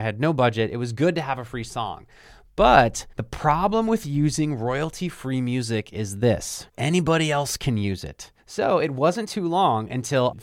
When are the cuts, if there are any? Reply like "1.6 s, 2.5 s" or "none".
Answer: 3.1 s, 6.7 s, 8.4 s